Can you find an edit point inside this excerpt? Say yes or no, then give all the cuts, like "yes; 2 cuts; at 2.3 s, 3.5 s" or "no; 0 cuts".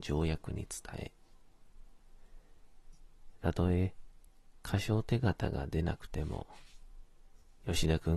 no; 0 cuts